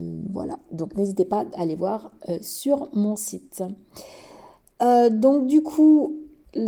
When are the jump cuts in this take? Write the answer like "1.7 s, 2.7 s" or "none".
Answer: none